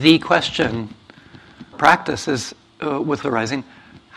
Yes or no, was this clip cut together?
yes